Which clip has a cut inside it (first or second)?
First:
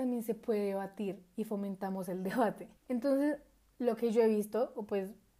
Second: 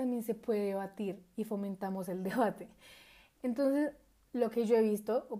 first